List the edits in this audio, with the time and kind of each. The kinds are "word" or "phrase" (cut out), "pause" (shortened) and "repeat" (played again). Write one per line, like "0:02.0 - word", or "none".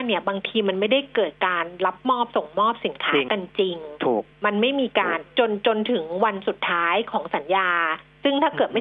0:04.3 - pause